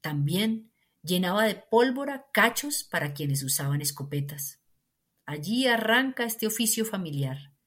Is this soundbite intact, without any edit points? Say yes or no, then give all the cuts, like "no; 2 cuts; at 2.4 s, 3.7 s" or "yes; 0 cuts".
yes; 0 cuts